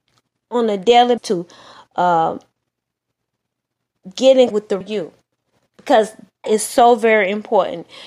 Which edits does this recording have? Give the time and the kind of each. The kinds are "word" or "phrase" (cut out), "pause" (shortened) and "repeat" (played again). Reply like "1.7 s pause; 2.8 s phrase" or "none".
1.2 s word; 4.5 s word; 4.8 s word; 6.4 s word